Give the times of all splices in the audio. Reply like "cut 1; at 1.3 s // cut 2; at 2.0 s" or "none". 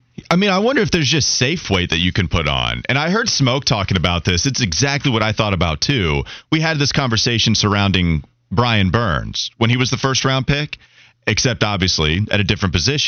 none

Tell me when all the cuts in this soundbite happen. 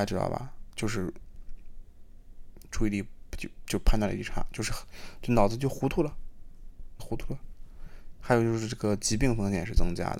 cut 1; at 7.0 s

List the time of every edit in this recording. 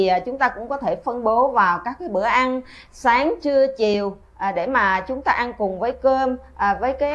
none

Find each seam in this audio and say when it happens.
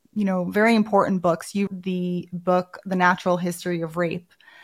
cut 1; at 1.7 s

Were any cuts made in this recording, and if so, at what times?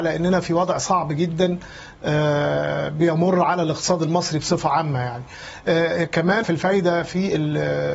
cut 1; at 6.4 s

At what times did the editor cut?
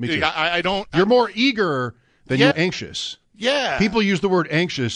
cut 1; at 2.5 s

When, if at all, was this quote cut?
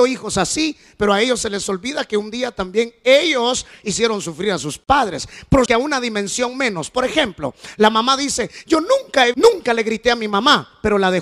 cut 1; at 5.7 s // cut 2; at 9.3 s

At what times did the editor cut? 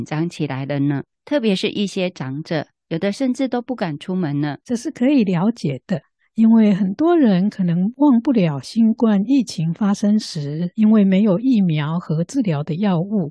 cut 1; at 4.6 s

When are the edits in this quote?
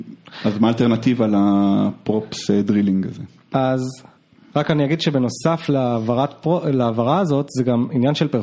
none

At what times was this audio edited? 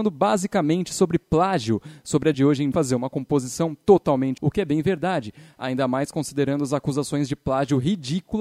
cut 1; at 2.3 s // cut 2; at 2.7 s // cut 3; at 4.4 s

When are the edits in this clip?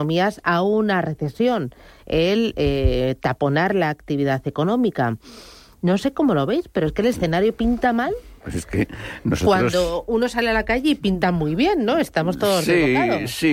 none

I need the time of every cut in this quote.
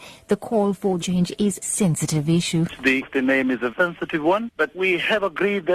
cut 1; at 1.0 s // cut 2; at 1.6 s // cut 3; at 3.0 s // cut 4; at 3.7 s // cut 5; at 4.7 s

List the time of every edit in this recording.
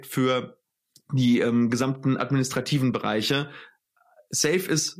none

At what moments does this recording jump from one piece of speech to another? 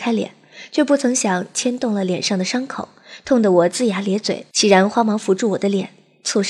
cut 1; at 4.5 s

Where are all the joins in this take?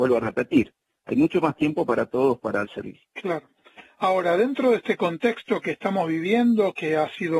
cut 1; at 2.6 s // cut 2; at 3.1 s

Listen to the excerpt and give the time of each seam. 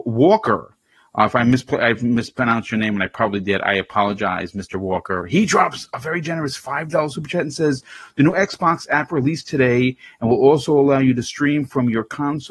none

